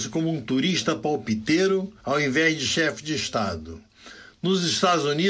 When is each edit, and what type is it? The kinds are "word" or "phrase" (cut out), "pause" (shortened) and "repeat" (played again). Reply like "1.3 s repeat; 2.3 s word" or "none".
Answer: 2.0 s pause